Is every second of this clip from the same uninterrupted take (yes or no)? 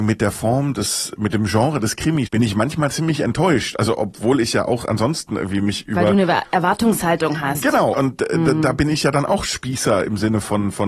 no